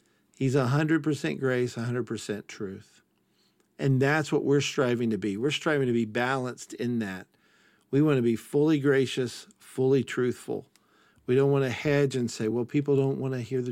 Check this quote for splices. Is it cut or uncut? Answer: uncut